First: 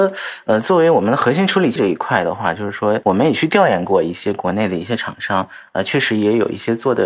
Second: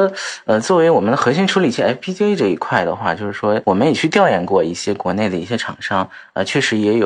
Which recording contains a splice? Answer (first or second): first